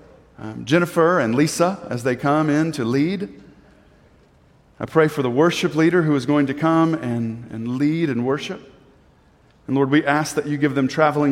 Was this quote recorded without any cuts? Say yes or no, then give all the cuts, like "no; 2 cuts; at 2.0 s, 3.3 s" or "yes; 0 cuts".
yes; 0 cuts